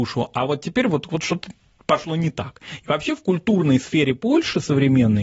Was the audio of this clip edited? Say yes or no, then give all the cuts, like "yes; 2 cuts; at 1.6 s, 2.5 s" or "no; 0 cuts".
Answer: no; 0 cuts